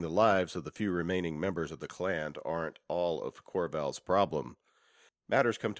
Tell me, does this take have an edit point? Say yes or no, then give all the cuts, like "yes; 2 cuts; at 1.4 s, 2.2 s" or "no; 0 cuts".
no; 0 cuts